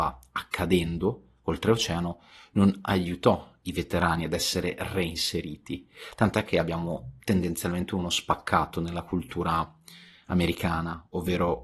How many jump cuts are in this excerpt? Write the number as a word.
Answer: zero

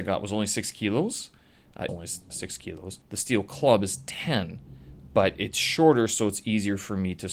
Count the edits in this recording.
three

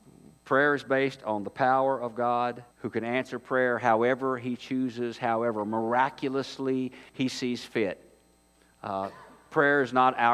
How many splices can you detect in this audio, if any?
two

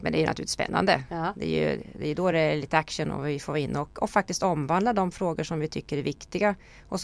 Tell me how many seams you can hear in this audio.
zero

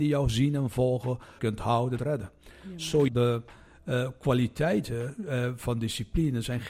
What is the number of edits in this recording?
three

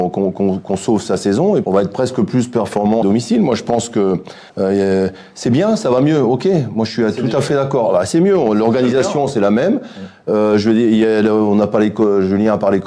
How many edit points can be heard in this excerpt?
three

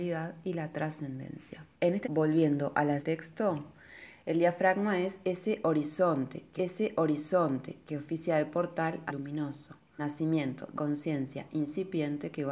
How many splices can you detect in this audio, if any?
seven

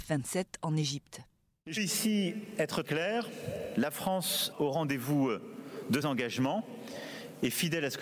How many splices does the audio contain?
four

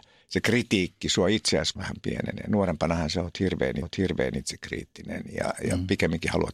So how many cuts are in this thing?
two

